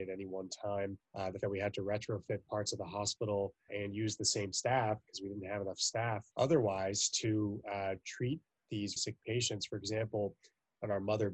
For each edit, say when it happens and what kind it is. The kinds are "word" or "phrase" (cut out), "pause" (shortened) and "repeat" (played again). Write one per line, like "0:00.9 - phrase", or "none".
0:01.0 - pause
0:01.4 - word
0:03.7 - word
0:06.3 - pause
0:09.0 - word